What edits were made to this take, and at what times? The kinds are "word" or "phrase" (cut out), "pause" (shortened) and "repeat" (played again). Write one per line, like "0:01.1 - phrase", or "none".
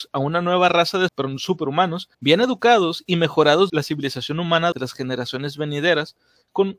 0:01.1 - word
0:02.1 - pause
0:03.7 - phrase
0:04.7 - word